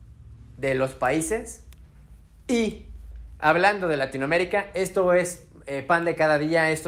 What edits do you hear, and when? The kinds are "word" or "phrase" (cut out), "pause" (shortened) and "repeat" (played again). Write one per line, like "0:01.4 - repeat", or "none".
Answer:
none